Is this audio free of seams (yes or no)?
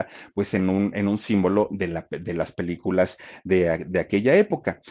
yes